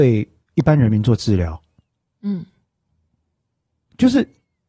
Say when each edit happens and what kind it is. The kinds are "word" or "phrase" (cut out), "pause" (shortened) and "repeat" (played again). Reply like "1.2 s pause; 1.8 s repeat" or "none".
none